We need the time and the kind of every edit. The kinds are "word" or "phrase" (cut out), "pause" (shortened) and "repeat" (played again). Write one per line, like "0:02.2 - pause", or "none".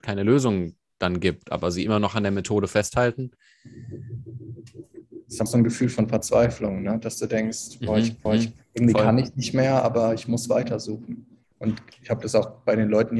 0:05.5 - word
0:08.3 - repeat
0:11.4 - pause